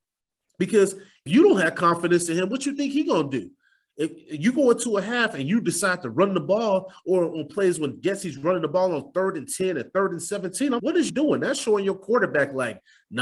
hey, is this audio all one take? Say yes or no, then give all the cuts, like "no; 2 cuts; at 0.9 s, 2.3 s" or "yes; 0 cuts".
no; 3 cuts; at 1.3 s, 10.8 s, 11.1 s